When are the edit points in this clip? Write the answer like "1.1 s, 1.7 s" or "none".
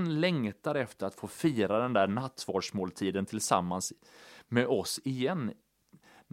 none